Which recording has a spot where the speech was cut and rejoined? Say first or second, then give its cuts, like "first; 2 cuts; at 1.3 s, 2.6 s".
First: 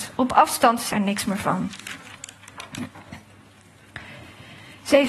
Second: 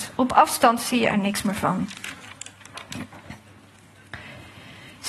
first; 1 cut; at 0.9 s